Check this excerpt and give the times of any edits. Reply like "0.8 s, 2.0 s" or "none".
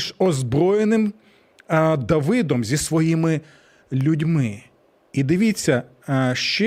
none

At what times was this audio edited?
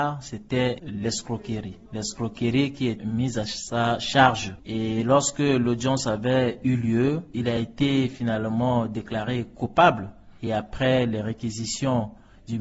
none

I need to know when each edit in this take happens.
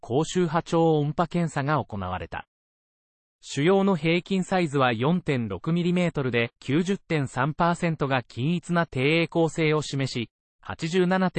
6.6 s

